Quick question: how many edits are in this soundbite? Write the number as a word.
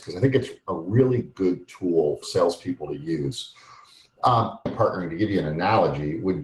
two